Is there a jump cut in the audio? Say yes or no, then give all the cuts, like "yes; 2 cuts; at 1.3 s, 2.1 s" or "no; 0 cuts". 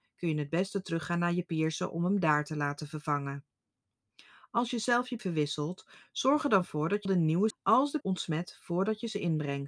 yes; 4 cuts; at 5.2 s, 7.1 s, 7.5 s, 8.0 s